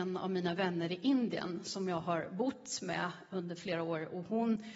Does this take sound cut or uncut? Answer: uncut